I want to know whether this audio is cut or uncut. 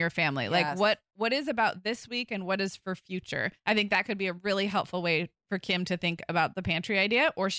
cut